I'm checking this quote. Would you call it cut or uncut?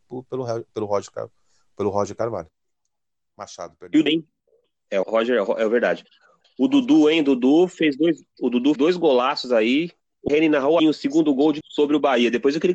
cut